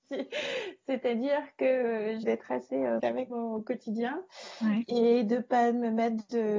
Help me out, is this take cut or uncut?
cut